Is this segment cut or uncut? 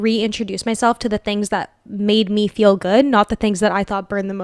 uncut